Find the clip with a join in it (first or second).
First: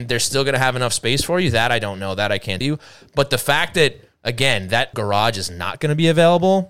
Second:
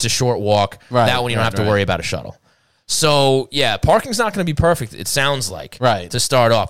first